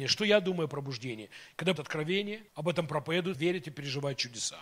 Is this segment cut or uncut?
cut